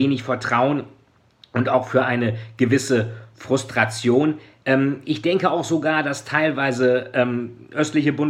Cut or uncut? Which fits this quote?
uncut